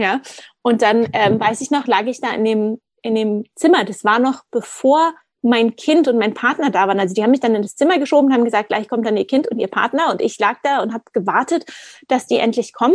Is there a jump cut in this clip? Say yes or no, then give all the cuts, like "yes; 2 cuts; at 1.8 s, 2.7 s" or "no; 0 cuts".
no; 0 cuts